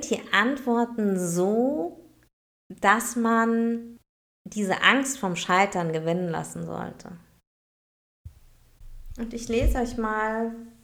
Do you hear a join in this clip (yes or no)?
no